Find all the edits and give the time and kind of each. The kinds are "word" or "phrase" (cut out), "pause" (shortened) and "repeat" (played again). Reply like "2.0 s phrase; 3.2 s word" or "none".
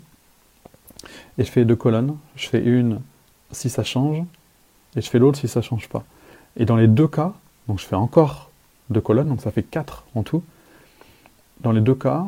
none